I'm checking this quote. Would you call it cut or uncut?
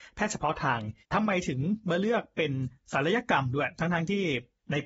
cut